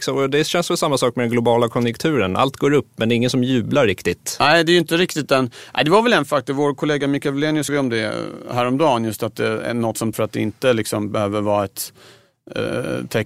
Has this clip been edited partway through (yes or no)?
yes